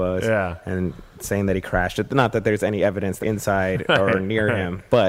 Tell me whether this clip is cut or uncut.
cut